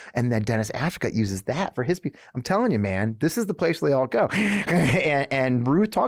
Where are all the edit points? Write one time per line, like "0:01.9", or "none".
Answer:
none